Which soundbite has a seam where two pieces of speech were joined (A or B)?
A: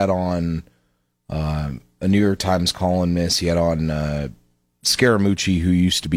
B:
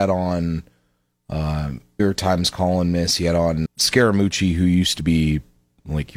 B